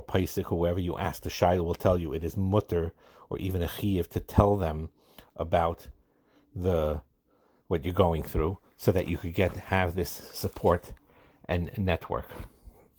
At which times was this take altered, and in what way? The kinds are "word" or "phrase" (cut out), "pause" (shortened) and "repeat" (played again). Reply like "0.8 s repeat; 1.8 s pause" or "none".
none